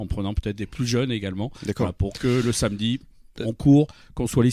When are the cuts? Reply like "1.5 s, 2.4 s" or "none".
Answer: none

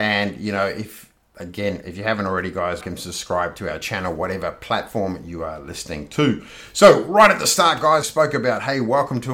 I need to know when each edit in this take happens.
2.8 s, 8.0 s

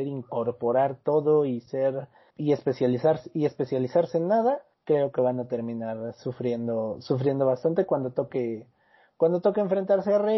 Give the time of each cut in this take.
2.3 s, 4.7 s

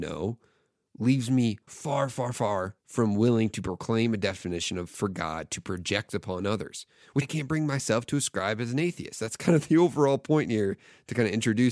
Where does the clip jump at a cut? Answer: 1.7 s, 2.8 s, 7.2 s

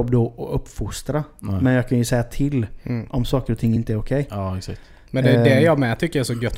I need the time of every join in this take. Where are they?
none

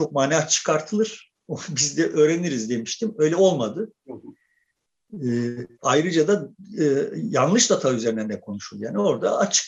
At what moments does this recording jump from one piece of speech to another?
5.7 s

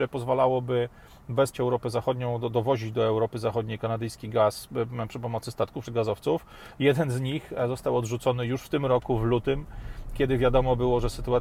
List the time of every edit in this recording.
1.5 s, 5.8 s

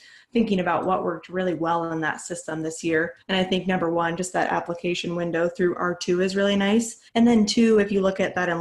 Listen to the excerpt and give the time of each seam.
3.2 s, 7.1 s

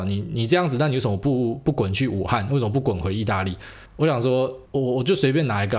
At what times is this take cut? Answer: 3.9 s, 4.7 s

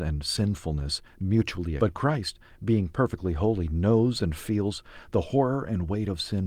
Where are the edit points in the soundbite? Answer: 1.8 s

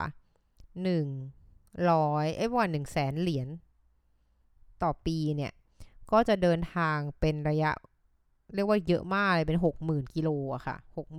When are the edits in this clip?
none

